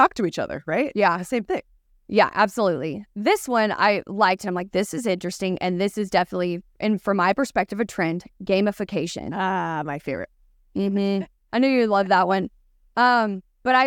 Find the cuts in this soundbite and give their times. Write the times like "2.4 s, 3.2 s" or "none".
none